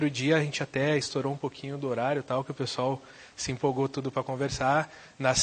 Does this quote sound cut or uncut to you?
uncut